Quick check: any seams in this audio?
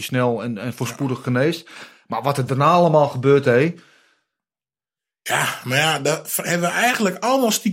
no; 0 cuts

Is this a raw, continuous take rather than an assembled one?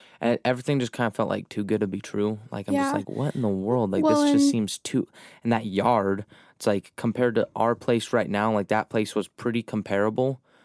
yes; 0 cuts

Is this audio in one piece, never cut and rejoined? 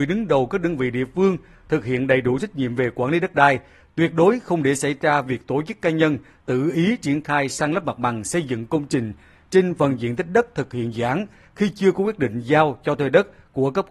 yes; 0 cuts

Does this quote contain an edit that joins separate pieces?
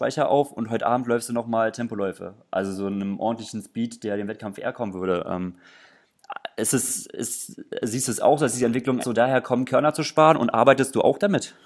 yes; 1 cut; at 9.0 s

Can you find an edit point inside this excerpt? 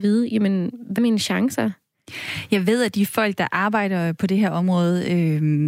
yes; 1 cut; at 1.0 s

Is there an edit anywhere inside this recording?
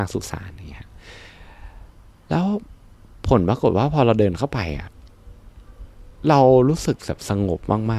no; 0 cuts

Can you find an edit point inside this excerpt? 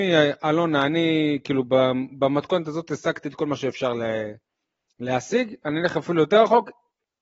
no; 0 cuts

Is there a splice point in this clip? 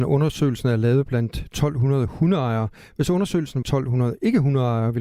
yes; 1 cut; at 3.6 s

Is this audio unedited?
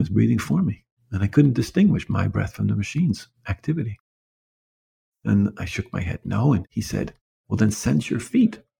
yes; 0 cuts

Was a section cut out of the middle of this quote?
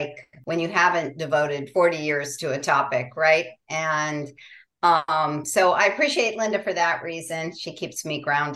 no; 0 cuts

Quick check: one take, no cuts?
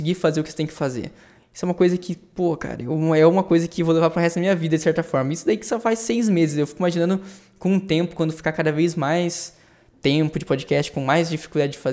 yes; 0 cuts

